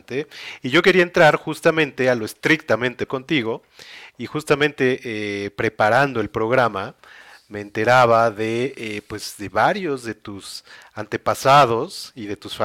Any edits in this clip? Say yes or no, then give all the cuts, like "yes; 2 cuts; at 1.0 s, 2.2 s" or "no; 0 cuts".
yes; 1 cut; at 3.1 s